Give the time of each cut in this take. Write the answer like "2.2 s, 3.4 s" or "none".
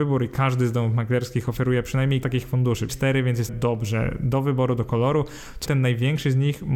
2.2 s, 2.9 s, 3.5 s, 5.7 s